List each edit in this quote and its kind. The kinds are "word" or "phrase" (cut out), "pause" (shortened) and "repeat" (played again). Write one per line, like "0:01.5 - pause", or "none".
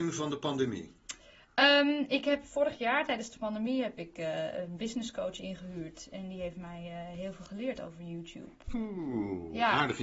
none

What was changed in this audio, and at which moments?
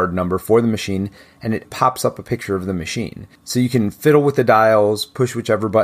0:01.6 - word

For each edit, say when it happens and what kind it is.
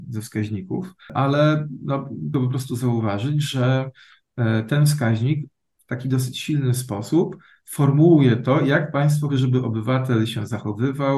0:01.0 - pause
0:02.3 - phrase
0:09.3 - word

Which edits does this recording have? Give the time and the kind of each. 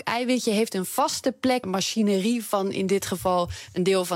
0:01.6 - phrase

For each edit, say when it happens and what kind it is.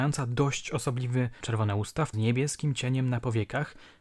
0:01.4 - phrase
0:02.1 - phrase

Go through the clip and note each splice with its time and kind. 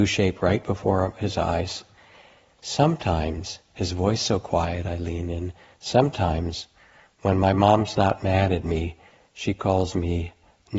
none

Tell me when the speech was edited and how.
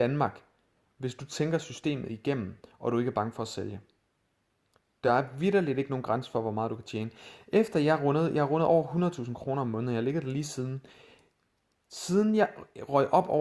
none

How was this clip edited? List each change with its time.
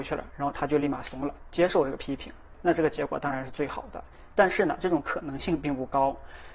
0:02.5 - word

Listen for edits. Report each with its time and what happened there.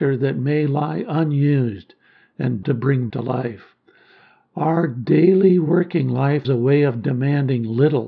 0:02.6 - word
0:03.1 - word
0:06.4 - word

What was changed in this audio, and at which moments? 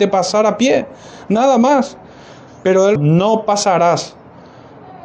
0:03.0 - word

